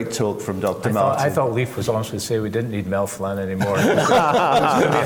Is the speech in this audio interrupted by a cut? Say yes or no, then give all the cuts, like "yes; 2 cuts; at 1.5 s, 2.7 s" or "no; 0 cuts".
no; 0 cuts